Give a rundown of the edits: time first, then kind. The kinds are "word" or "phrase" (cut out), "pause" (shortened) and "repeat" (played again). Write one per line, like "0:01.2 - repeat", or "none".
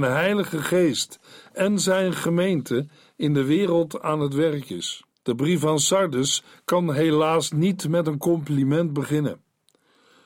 0:05.1 - pause

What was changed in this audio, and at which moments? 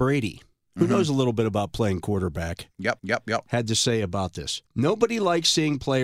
0:03.0 - repeat
0:04.7 - pause

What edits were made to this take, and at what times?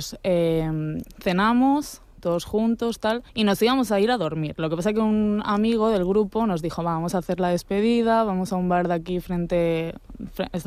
0:03.3 - pause

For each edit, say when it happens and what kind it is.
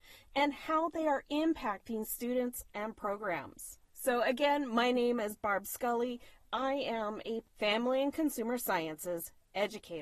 0:03.9 - pause
0:06.4 - word

